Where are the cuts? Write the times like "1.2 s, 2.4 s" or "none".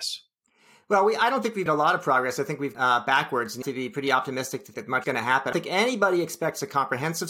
1.7 s, 2.7 s, 3.6 s, 4.7 s, 5.0 s, 5.5 s